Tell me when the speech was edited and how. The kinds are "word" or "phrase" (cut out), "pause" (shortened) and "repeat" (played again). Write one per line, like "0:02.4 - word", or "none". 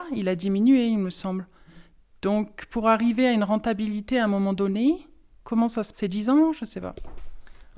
0:05.9 - word